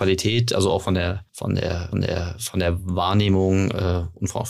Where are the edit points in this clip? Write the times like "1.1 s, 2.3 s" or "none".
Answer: 1.3 s, 1.9 s

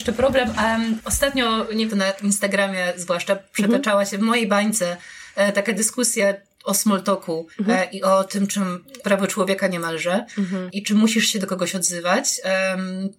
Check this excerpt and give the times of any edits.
1.9 s, 7.5 s, 9.0 s

